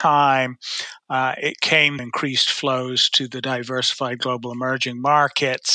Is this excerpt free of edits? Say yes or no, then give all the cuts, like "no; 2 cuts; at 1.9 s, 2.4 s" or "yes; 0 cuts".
no; 1 cut; at 2.0 s